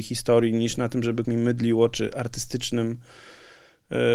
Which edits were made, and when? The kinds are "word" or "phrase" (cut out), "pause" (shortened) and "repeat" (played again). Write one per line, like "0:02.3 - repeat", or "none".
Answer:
0:01.2 - word